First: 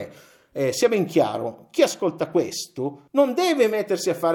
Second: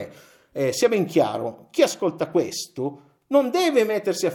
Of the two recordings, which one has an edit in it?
first; 1 cut; at 3.1 s

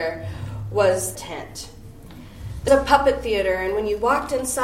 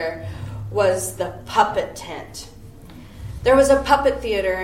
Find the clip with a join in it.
first; 2 cuts; at 1.1 s, 2.7 s

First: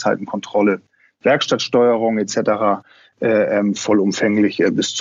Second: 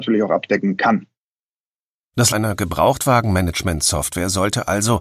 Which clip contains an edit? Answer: second; 1 cut; at 2.3 s

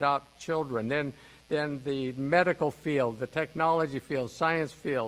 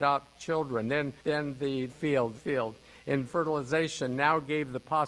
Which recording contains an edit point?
second; 4 cuts; at 1.2 s, 1.9 s, 2.3 s, 3.2 s

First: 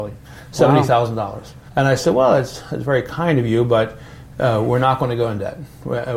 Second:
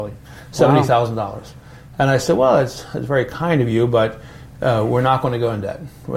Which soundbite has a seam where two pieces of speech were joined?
first; 1 cut; at 1.7 s

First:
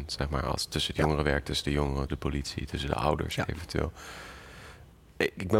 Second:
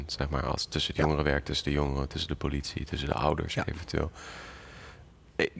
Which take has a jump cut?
first; 1 cut; at 2.1 s

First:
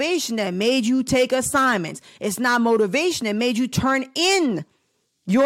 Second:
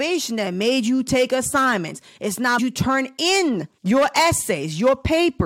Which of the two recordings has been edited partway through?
second; 2 cuts; at 2.6 s, 3.8 s

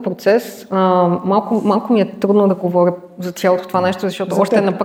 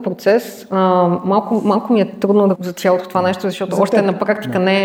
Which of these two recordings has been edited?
second; 1 cut; at 2.6 s

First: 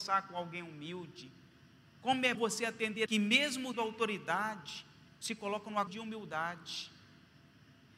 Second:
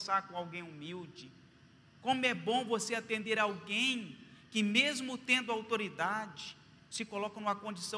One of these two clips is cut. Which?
first; 4 cuts; at 2.3 s, 3.1 s, 3.7 s, 5.9 s

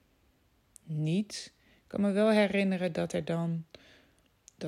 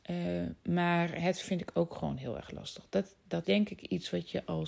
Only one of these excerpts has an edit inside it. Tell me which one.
second; 2 cuts; at 1.4 s, 3.4 s

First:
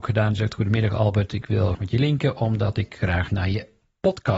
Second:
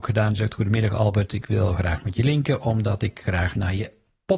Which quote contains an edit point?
first; 1 cut; at 1.7 s

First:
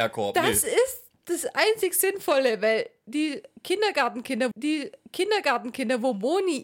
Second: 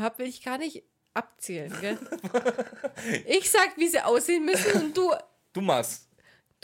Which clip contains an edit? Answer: first; 1 cut; at 4.5 s

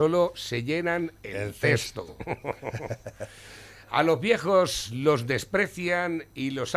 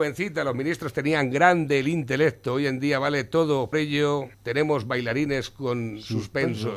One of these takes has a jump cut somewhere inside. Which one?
second; 2 cuts; at 3.7 s, 4.3 s

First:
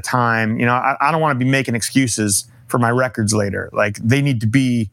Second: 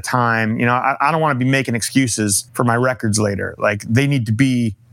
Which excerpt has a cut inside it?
second; 1 cut; at 2.5 s

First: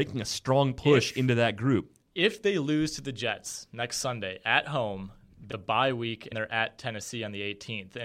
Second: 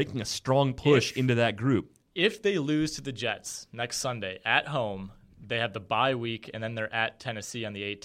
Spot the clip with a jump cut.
first; 2 cuts; at 5.5 s, 6.3 s

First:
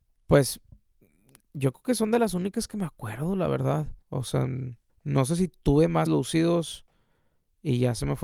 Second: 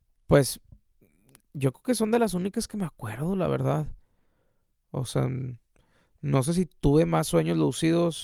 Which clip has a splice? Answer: first; 3 cuts; at 4.0 s, 4.9 s, 6.1 s

